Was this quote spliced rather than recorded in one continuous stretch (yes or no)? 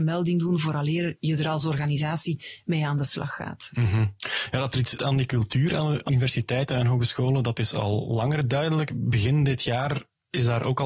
yes